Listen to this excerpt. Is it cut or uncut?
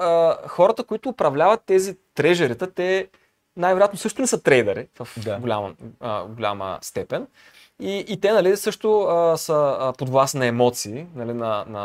uncut